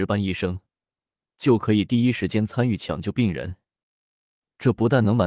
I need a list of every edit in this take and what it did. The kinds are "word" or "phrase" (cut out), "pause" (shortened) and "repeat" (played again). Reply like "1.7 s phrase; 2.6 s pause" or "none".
none